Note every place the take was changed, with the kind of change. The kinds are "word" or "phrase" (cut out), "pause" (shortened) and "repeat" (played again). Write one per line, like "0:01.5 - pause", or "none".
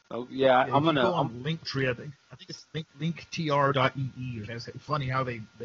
0:02.9 - pause
0:04.5 - word